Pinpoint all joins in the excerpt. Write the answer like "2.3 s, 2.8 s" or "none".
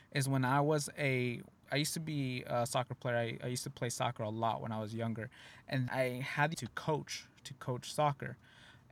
1.7 s, 5.9 s, 6.5 s